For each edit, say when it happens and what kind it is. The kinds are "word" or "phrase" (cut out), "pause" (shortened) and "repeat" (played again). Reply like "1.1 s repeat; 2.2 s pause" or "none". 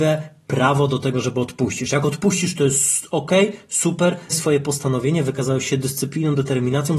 4.3 s word